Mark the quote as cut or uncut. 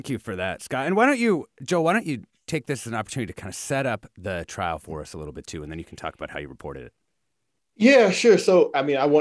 uncut